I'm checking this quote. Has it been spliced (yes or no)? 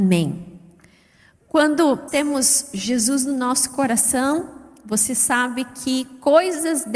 yes